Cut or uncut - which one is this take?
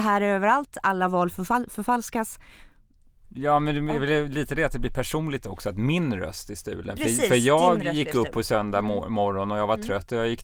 uncut